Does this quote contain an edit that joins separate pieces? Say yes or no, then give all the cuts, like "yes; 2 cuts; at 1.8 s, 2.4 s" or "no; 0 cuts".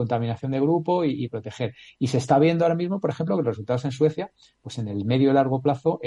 no; 0 cuts